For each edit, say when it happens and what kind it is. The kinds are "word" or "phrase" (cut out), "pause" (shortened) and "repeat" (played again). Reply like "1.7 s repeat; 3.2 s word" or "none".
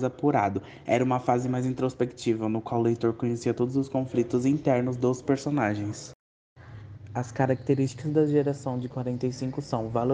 none